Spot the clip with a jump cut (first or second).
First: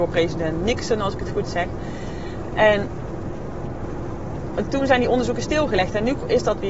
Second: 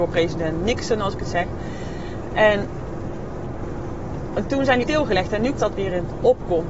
second